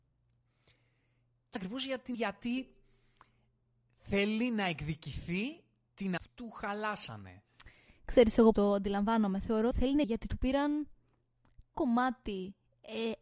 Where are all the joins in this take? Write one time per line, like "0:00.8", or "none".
0:01.6
0:02.1
0:06.2
0:08.5
0:09.7
0:10.0
0:11.7